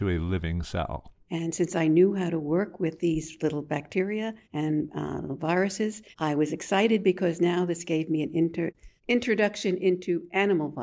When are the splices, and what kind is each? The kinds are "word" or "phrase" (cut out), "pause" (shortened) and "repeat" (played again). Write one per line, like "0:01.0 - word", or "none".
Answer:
0:04.4 - pause
0:06.1 - pause
0:09.0 - pause